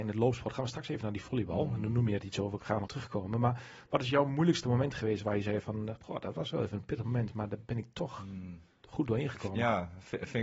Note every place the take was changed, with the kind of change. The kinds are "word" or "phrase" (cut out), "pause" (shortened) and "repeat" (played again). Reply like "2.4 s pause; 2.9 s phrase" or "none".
2.9 s word